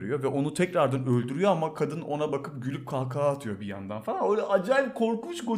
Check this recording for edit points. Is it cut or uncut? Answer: uncut